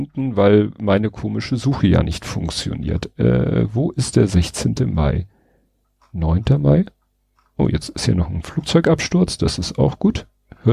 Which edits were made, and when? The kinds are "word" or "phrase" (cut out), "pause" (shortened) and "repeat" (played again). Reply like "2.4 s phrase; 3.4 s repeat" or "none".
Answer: none